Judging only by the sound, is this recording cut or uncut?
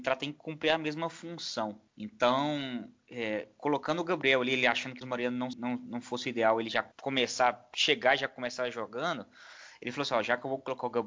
cut